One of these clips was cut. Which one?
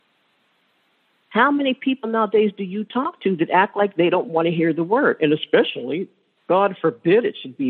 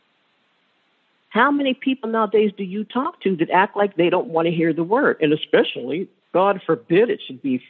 second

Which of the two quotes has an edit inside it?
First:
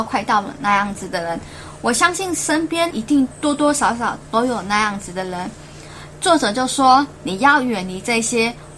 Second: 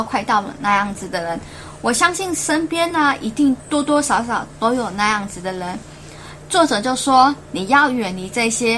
first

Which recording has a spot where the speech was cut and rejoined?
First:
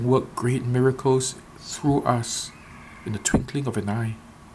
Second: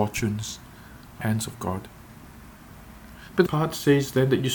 second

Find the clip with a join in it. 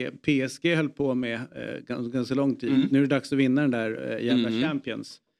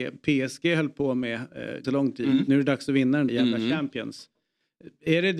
second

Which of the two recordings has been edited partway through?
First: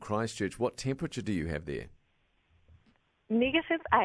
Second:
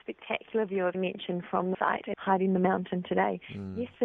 second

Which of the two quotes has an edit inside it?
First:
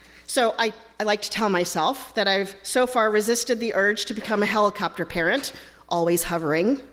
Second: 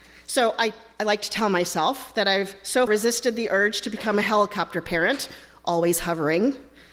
second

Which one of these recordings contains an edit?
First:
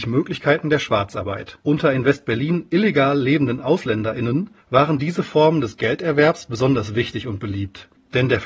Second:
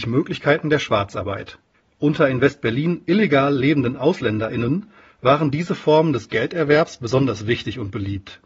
first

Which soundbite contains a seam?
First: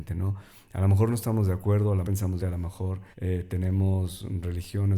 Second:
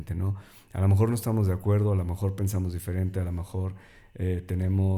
first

